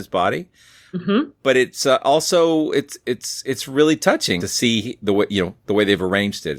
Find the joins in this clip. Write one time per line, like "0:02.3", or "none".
0:04.4